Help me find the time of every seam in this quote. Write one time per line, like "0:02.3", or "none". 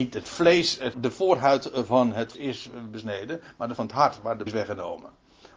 0:00.9
0:02.3
0:03.8
0:04.5